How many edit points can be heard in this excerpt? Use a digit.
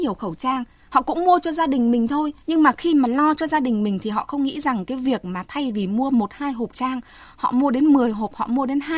2